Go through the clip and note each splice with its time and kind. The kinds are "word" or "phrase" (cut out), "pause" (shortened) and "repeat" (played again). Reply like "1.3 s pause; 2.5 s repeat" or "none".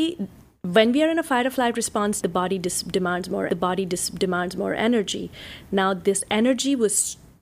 2.2 s word; 3.5 s repeat